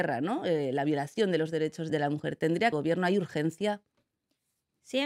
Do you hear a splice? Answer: yes; 2 cuts; at 1.9 s, 2.7 s

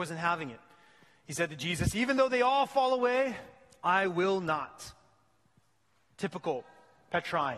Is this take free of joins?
yes; 0 cuts

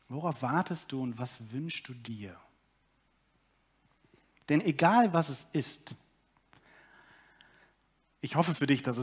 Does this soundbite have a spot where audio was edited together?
no; 0 cuts

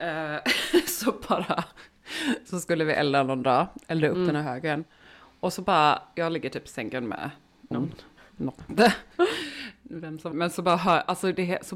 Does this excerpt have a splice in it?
yes; 3 cuts; at 7.7 s, 8.7 s, 10.3 s

